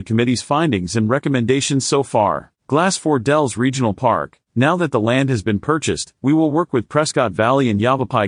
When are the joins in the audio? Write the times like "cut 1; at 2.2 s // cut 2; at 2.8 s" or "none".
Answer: cut 1; at 2.6 s // cut 2; at 4.4 s